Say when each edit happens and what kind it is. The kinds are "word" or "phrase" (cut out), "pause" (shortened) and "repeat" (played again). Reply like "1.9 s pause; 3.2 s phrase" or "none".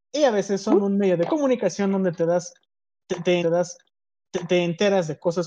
3.4 s repeat